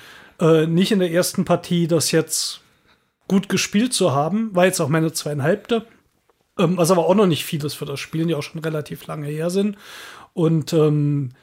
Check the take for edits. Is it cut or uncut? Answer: uncut